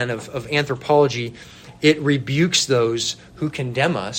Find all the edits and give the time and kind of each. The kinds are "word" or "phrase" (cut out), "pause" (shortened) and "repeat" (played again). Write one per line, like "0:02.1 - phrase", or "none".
none